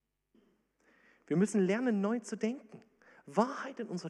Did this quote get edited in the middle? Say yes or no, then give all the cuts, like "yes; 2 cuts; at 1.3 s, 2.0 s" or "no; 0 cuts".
no; 0 cuts